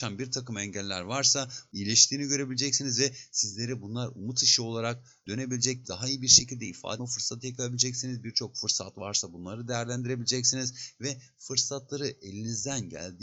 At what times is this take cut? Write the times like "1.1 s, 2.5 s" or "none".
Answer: 5.8 s, 7.0 s